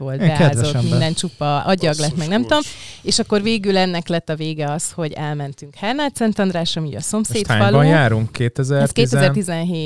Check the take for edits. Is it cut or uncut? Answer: uncut